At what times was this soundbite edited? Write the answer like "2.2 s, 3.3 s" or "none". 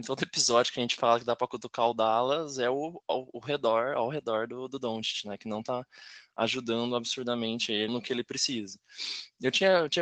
7.9 s

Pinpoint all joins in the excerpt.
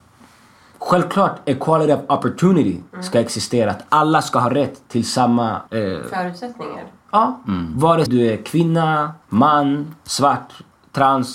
5.7 s, 8.1 s, 9.2 s

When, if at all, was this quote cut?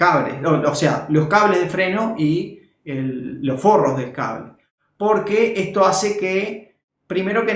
none

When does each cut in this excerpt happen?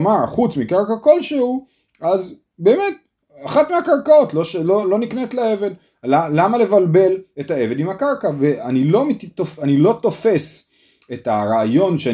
none

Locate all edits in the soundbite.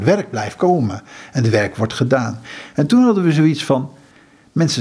none

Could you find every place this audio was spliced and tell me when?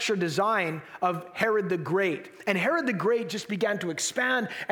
none

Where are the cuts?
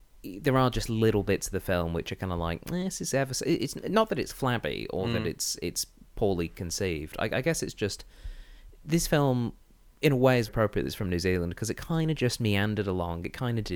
10.5 s

